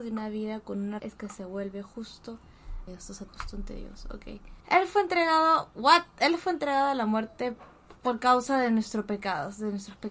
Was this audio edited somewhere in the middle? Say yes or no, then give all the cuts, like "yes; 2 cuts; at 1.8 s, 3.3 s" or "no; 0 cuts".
yes; 4 cuts; at 1.0 s, 2.9 s, 3.3 s, 8.0 s